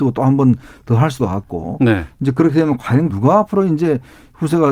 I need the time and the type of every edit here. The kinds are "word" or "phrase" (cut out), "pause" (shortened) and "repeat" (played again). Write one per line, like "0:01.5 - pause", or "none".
0:01.2 - word
0:03.1 - word